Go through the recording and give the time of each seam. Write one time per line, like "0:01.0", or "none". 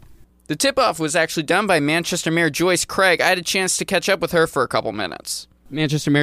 none

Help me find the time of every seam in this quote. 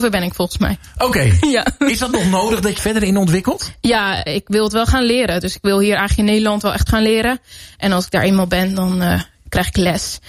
0:02.8
0:04.3
0:06.9

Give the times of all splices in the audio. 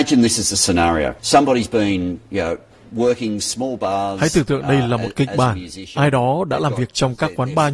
0:01.2

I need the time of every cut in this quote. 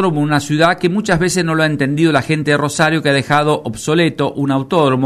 none

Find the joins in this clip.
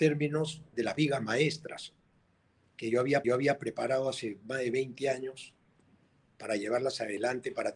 0:03.2

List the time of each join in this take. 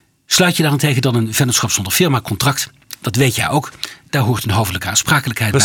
0:02.9

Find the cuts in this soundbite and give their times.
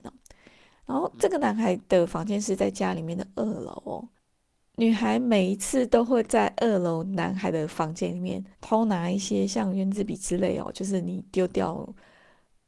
0:08.5

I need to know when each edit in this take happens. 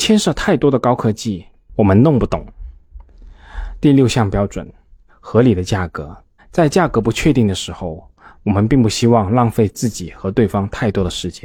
0:06.4

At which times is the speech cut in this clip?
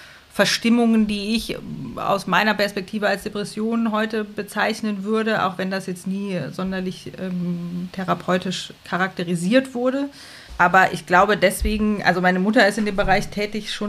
0:08.8
0:10.4

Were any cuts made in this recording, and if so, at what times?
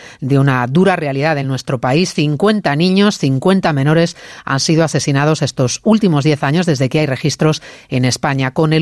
none

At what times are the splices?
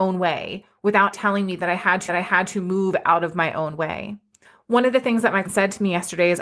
0:01.1
0:02.1
0:04.4
0:05.4

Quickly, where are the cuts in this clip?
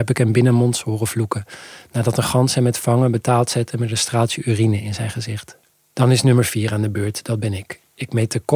0:05.7

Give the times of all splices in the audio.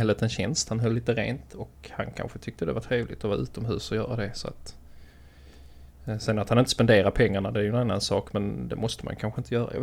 none

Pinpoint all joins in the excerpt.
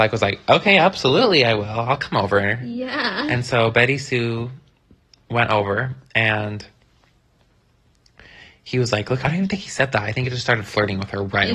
0:09.2

